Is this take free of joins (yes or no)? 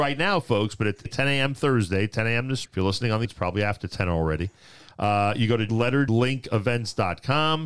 no